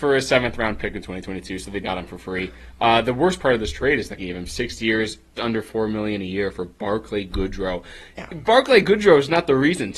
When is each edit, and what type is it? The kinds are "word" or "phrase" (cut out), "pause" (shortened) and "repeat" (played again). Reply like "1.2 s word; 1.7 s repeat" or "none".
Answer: 1.8 s word; 4.2 s phrase; 5.4 s word